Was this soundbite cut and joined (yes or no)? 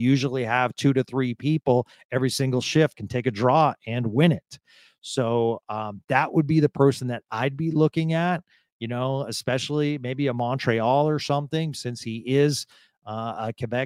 yes